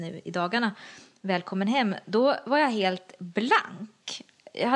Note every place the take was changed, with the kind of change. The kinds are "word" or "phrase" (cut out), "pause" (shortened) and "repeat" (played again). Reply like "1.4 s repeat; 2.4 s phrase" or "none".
none